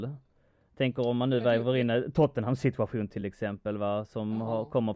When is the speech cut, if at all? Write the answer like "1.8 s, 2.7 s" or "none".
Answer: none